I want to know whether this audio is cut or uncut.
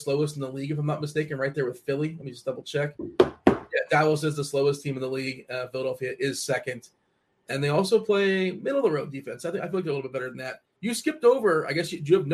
uncut